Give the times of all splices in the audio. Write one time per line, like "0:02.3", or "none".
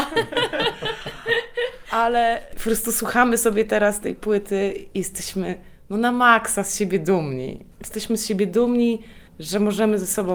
0:07.7
0:09.3

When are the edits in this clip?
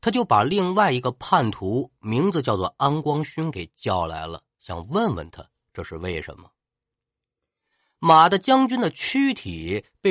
none

